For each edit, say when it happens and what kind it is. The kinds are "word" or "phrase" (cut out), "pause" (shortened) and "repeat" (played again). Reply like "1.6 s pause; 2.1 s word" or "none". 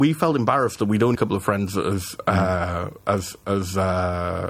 1.1 s word